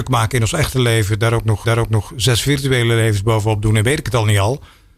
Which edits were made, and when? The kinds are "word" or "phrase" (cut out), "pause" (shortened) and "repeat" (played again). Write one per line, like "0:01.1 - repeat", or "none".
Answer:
0:01.6 - repeat